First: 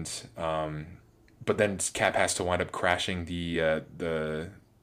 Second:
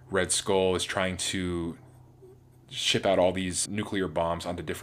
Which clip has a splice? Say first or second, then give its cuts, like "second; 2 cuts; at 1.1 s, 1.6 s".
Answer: second; 1 cut; at 3.7 s